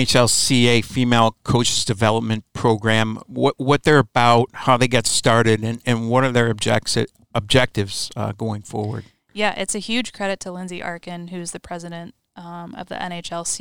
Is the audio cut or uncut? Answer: uncut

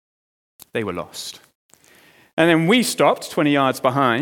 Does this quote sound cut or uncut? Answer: uncut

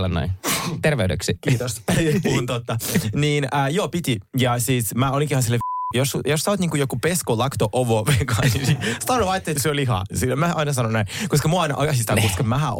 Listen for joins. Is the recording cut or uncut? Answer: cut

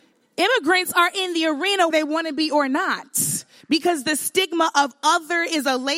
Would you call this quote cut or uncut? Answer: cut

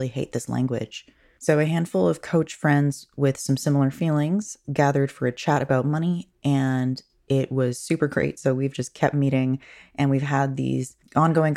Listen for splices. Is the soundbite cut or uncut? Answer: uncut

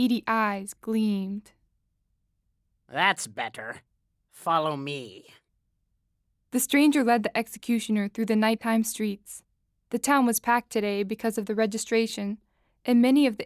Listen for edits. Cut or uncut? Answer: uncut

